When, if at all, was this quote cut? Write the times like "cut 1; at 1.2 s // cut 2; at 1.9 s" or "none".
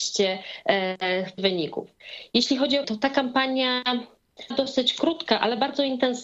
cut 1; at 1.4 s // cut 2; at 2.8 s // cut 3; at 4.5 s